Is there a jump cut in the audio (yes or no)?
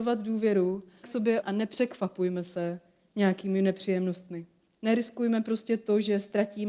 yes